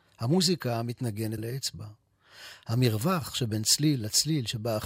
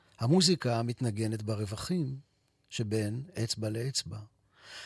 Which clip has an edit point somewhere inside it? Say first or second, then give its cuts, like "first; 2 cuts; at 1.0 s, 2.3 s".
first; 1 cut; at 1.4 s